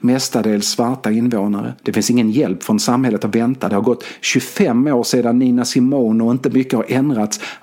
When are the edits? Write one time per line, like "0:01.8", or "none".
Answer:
0:01.8